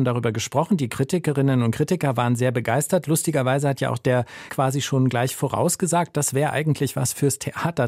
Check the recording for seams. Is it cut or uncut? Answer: cut